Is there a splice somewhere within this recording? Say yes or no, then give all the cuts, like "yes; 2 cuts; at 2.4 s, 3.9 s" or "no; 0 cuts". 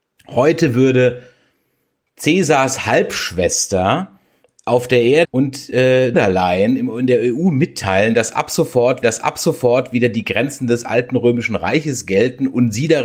yes; 3 cuts; at 5.2 s, 6.1 s, 9.0 s